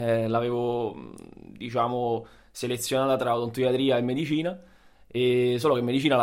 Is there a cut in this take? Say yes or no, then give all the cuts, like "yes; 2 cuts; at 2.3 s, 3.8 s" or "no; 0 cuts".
no; 0 cuts